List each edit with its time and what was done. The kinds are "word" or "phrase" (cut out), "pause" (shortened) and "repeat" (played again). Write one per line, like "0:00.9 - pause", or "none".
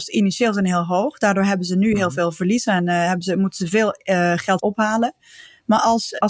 0:04.6 - phrase